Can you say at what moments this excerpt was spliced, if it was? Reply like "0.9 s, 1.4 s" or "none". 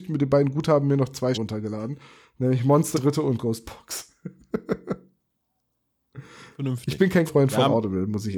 1.3 s, 2.9 s, 7.3 s

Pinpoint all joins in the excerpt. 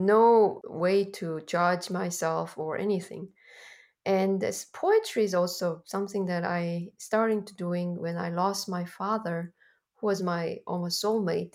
none

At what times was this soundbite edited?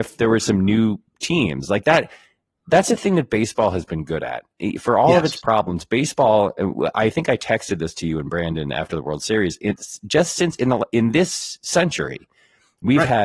none

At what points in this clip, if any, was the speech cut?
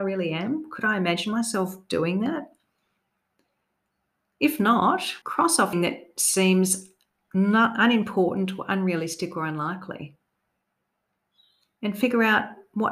5.2 s, 5.7 s

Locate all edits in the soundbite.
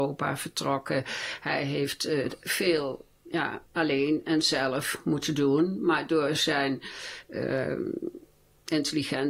3.7 s

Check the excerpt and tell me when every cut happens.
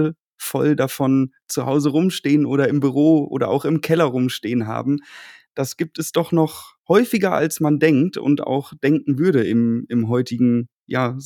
none

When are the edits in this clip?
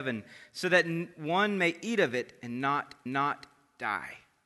3.1 s

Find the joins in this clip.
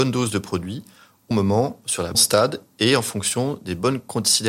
1.3 s, 2.1 s

